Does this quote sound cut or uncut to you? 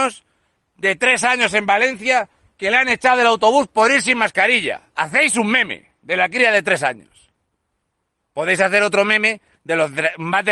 uncut